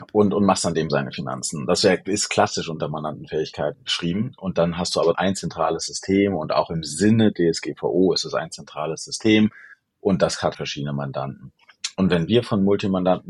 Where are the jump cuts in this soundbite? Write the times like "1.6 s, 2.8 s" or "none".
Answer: 3.7 s, 5.1 s, 7.3 s, 10.5 s